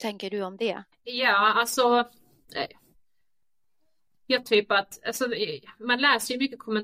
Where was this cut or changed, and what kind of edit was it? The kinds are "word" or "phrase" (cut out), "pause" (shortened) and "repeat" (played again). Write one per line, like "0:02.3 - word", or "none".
0:00.9 - pause
0:04.4 - word